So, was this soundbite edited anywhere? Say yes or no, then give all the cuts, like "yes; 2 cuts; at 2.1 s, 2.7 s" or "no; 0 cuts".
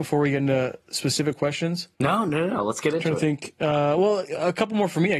yes; 1 cut; at 1.9 s